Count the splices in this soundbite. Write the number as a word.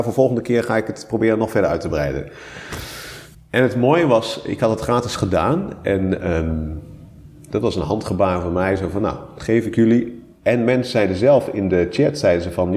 one